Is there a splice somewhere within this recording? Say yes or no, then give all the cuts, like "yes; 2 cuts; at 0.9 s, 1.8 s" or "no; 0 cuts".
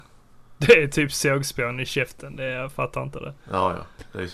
no; 0 cuts